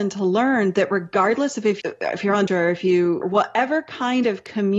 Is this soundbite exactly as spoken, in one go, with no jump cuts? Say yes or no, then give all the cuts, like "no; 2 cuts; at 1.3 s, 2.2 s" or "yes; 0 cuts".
no; 3 cuts; at 1.8 s, 2.5 s, 3.2 s